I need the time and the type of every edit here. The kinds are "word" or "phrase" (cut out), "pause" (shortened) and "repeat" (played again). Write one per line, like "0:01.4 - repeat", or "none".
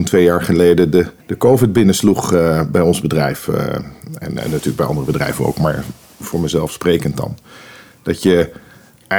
0:01.2 - pause